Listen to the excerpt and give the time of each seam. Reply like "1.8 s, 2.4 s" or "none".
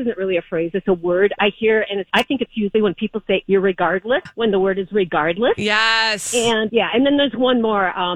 2.1 s, 2.7 s, 4.3 s, 6.7 s